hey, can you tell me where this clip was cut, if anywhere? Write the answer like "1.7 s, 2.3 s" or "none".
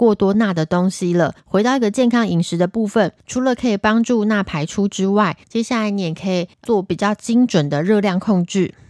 1.4 s, 3.2 s, 5.4 s, 6.5 s

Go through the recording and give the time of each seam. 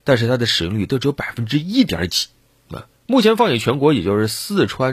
3.0 s

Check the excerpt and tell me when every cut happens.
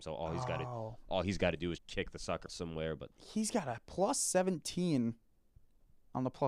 1.8 s, 2.5 s, 3.1 s

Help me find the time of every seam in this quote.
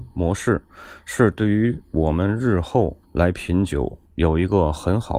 3.0 s, 4.1 s

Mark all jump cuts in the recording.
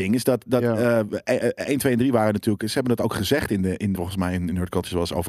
3.9 s

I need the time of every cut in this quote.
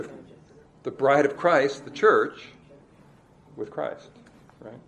none

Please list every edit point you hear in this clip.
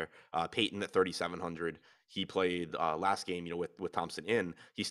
none

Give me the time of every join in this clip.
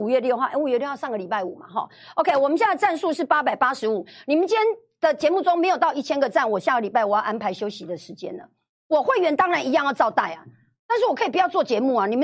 none

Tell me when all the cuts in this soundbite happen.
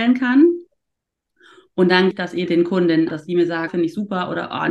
2.1 s, 2.5 s, 3.1 s, 3.7 s

